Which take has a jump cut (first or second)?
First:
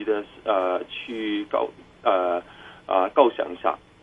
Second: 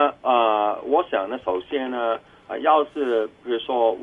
second